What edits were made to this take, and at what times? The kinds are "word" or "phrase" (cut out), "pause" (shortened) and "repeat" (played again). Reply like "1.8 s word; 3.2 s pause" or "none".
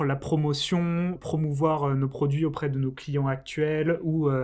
1.1 s word